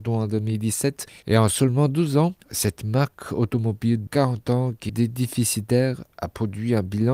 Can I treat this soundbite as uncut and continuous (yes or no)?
no